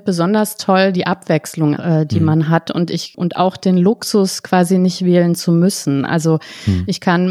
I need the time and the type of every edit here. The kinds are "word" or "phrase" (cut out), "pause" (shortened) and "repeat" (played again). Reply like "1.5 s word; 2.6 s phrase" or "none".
1.8 s word